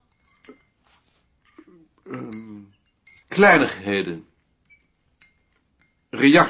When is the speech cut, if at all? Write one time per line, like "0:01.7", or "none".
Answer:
0:03.2